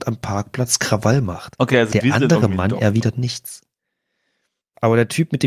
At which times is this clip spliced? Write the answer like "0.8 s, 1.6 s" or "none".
none